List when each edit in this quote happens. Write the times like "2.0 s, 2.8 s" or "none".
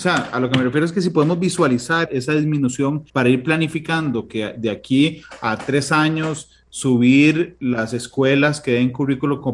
2.1 s, 3.1 s